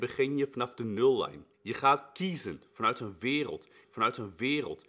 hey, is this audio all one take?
no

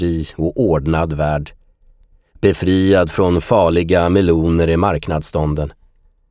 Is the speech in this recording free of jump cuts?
yes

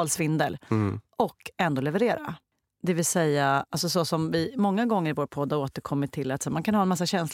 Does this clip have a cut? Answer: no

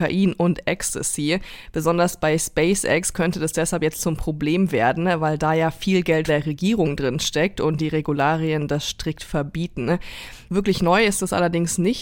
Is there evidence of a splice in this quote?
yes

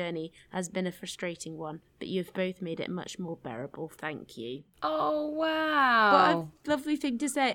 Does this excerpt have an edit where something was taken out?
no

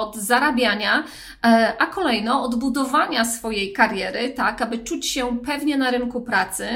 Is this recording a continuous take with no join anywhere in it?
yes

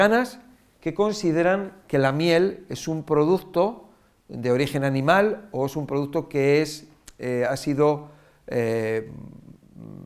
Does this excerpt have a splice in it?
no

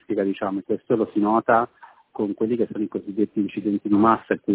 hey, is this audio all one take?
yes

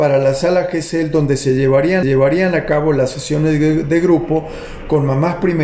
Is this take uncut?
no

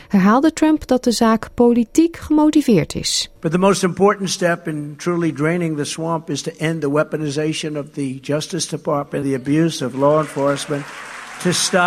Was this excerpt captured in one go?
no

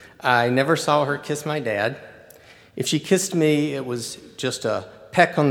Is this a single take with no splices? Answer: yes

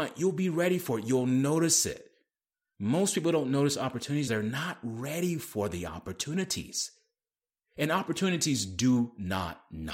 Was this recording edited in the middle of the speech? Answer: yes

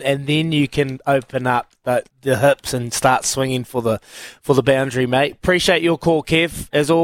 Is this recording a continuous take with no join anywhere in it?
no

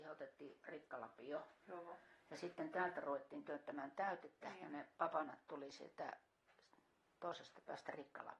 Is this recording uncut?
yes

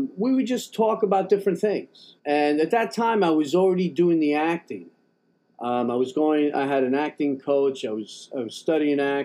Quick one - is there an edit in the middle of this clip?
yes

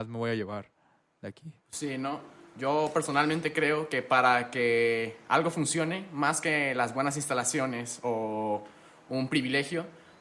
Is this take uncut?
no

